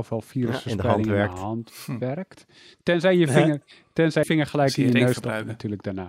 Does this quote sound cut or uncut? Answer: cut